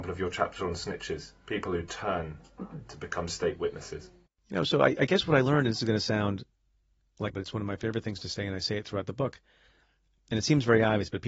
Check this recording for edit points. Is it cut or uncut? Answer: cut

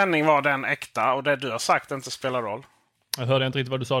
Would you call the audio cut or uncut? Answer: uncut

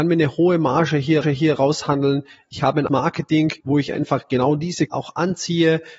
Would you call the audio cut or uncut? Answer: cut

